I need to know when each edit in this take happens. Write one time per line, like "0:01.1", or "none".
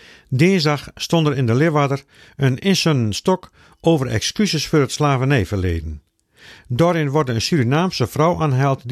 none